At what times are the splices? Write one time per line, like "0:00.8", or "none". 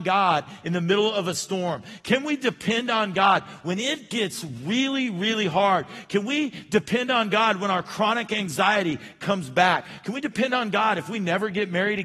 none